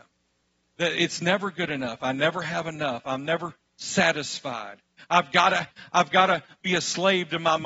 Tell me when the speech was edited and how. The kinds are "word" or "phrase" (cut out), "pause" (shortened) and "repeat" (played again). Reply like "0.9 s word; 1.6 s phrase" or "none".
none